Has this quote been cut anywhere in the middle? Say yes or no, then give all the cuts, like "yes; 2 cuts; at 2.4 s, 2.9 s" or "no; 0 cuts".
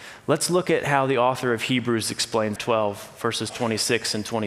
yes; 1 cut; at 2.6 s